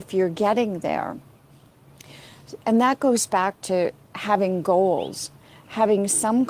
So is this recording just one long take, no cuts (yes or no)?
yes